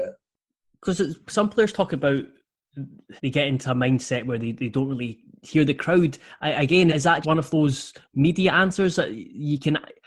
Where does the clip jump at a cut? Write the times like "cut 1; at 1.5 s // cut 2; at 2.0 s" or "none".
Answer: cut 1; at 3.2 s // cut 2; at 6.9 s // cut 3; at 7.2 s

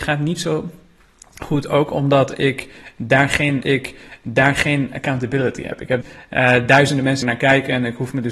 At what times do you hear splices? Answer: cut 1; at 3.6 s // cut 2; at 6.0 s // cut 3; at 7.2 s

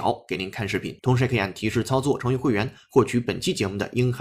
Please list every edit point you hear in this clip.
cut 1; at 1.0 s

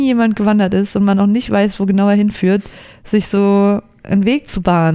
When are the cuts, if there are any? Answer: none

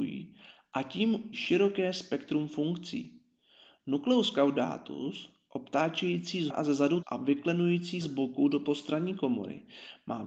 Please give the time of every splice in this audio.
cut 1; at 1.3 s // cut 2; at 6.5 s // cut 3; at 7.0 s // cut 4; at 8.0 s

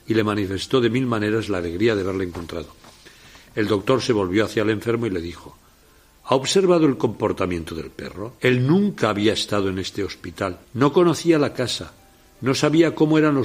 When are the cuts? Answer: cut 1; at 8.4 s // cut 2; at 10.6 s

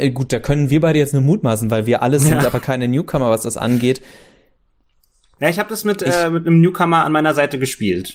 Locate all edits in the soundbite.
none

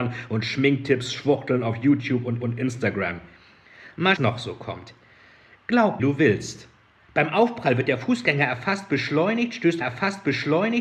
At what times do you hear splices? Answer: cut 1; at 2.4 s // cut 2; at 4.2 s // cut 3; at 6.0 s // cut 4; at 9.8 s

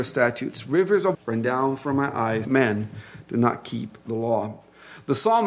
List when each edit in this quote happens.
cut 1; at 1.1 s // cut 2; at 2.4 s

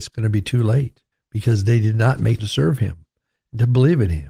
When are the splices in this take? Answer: cut 1; at 1.1 s // cut 2; at 2.4 s

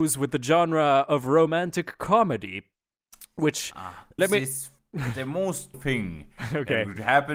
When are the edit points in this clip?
cut 1; at 4.2 s // cut 2; at 4.8 s // cut 3; at 5.7 s

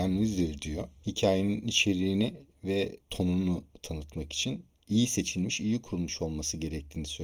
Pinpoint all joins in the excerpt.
cut 1; at 3.0 s

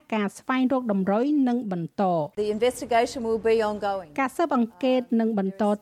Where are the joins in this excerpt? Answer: cut 1; at 2.3 s

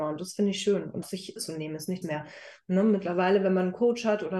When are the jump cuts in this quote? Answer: cut 1; at 1.0 s // cut 2; at 1.4 s // cut 3; at 2.0 s

